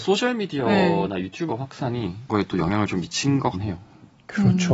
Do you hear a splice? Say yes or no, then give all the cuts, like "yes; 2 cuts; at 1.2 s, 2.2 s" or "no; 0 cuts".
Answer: yes; 3 cuts; at 1.5 s, 2.3 s, 3.5 s